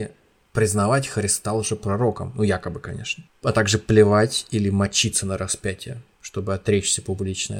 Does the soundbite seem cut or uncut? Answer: uncut